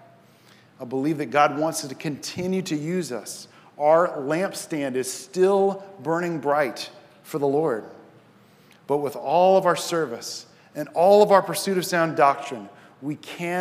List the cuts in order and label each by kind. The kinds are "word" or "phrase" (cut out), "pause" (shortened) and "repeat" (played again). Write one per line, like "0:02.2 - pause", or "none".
none